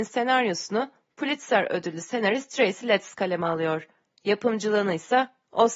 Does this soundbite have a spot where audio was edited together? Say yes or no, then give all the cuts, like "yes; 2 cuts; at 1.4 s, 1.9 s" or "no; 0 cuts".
no; 0 cuts